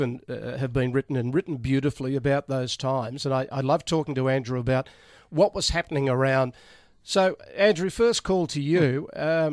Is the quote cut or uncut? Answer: uncut